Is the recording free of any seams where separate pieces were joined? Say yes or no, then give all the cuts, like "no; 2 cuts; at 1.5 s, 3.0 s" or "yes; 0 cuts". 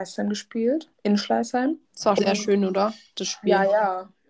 no; 3 cuts; at 0.9 s, 1.8 s, 2.2 s